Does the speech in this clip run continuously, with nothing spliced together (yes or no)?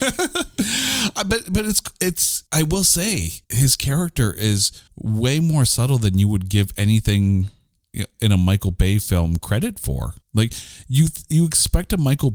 no